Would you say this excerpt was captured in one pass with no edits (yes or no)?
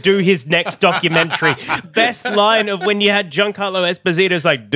no